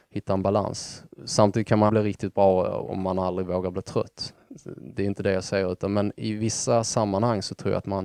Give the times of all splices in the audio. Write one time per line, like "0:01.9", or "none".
0:01.9